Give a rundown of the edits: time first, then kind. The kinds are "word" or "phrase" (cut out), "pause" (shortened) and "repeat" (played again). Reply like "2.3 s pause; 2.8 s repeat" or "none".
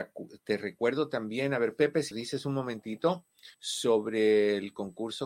2.1 s word; 3.5 s pause